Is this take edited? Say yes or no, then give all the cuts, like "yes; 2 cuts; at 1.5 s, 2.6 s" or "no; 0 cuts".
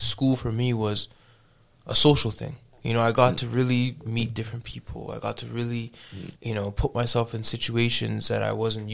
yes; 1 cut; at 6.4 s